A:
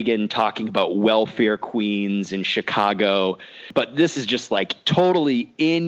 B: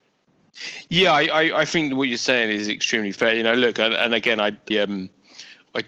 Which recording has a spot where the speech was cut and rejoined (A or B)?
B